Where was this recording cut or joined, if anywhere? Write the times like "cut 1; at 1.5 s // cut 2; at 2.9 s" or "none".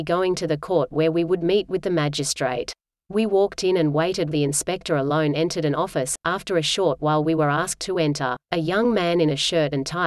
cut 1; at 2.9 s // cut 2; at 4.3 s // cut 3; at 8.4 s